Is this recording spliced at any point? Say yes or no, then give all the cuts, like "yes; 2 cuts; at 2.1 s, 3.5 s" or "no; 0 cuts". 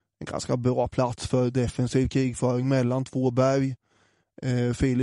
no; 0 cuts